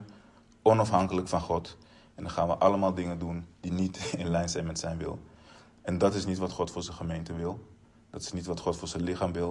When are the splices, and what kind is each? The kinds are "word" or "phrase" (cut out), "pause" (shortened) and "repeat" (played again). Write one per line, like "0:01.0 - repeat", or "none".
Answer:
0:03.5 - pause